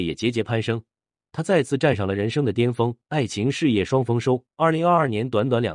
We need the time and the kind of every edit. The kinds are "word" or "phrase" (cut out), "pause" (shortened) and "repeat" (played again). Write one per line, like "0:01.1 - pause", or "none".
0:03.0 - pause
0:04.5 - pause